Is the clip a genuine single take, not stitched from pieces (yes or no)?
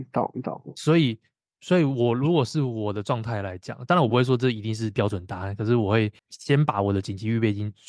no